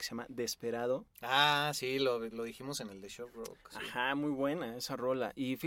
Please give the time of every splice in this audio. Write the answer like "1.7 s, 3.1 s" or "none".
1.1 s